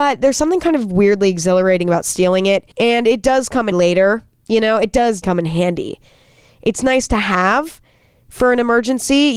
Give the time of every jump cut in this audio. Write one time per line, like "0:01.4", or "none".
0:02.7
0:03.7
0:05.2